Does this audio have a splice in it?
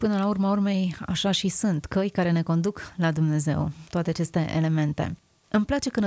no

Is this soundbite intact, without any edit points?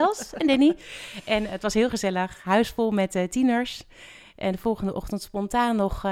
yes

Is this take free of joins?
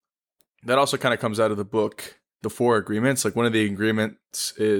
yes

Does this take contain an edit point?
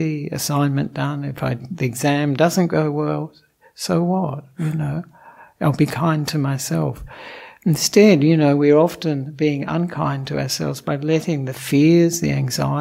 no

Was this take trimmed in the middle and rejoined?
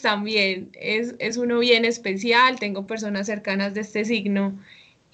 no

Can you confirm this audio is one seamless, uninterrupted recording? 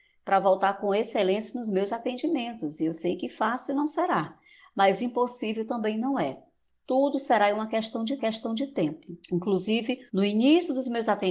no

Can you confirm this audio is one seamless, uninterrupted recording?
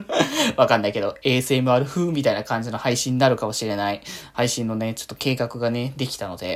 yes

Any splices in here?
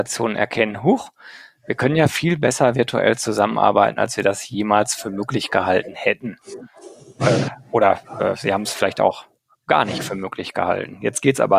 no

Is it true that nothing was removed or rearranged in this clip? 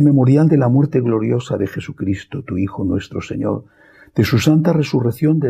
yes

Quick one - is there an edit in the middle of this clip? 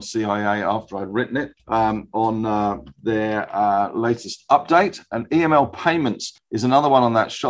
no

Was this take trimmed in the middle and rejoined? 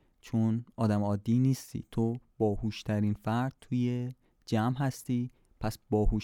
no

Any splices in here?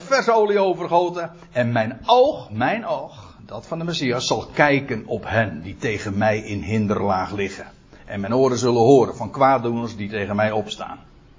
no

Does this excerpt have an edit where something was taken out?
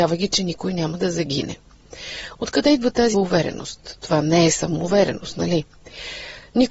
yes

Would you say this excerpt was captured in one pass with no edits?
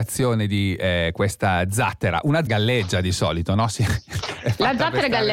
no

